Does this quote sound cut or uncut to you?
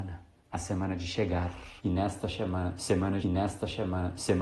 cut